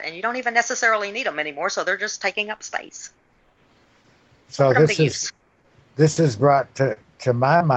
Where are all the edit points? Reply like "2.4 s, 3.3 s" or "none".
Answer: none

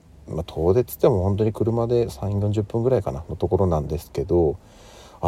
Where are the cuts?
none

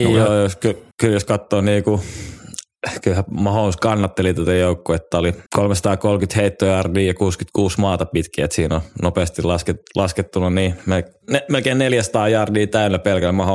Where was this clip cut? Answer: 0.9 s, 5.5 s

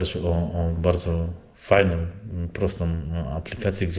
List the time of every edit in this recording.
none

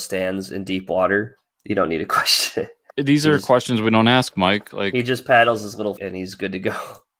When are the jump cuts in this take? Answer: 1.5 s, 2.9 s, 6.0 s

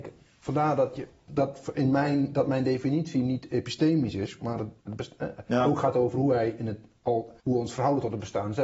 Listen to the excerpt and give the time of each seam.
4.8 s, 7.4 s

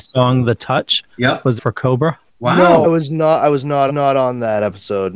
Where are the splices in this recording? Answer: 1.1 s, 1.6 s, 2.3 s, 2.8 s, 3.9 s

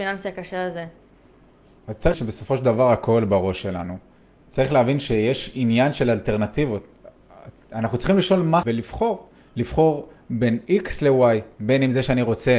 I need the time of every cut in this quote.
2.1 s, 8.6 s

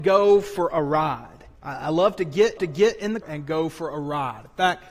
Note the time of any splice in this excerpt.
1.6 s, 2.6 s, 3.2 s

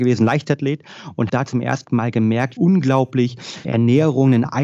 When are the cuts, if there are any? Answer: 1.3 s, 2.6 s, 3.6 s

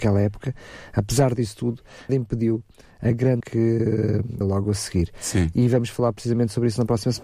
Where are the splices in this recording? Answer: 2.1 s, 3.4 s, 4.4 s

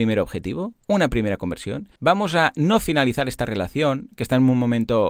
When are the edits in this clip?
2.0 s

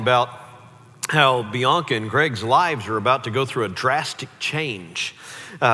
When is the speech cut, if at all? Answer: none

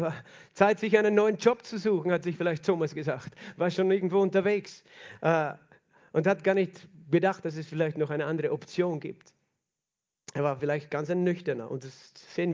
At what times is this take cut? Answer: none

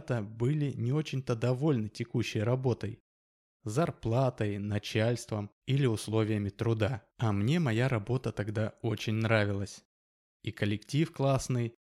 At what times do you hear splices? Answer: 5.6 s, 7.1 s

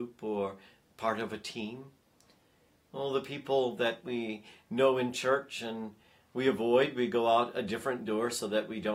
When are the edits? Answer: none

